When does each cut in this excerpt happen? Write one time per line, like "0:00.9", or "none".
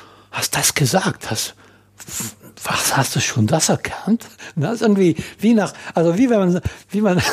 none